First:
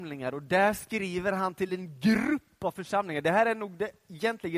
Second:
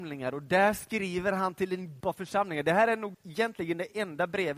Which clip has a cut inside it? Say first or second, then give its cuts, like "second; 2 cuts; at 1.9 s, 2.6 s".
second; 2 cuts; at 2.0 s, 3.1 s